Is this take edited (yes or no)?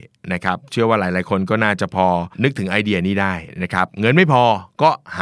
yes